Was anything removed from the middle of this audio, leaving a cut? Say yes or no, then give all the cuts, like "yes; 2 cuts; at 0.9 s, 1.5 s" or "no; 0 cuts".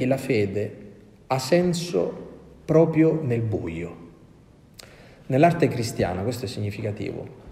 no; 0 cuts